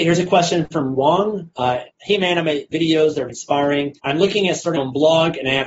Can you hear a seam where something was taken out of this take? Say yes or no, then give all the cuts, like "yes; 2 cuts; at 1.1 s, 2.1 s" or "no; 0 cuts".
yes; 6 cuts; at 0.9 s, 1.9 s, 2.7 s, 3.3 s, 4.0 s, 4.8 s